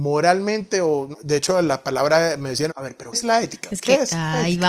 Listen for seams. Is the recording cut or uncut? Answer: cut